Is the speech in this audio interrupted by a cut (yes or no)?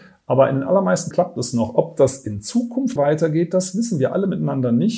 yes